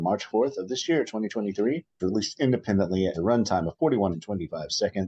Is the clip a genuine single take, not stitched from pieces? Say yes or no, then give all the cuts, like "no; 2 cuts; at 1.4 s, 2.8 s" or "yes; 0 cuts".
no; 3 cuts; at 2.0 s, 3.1 s, 4.1 s